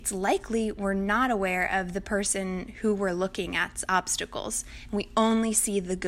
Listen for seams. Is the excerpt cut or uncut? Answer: uncut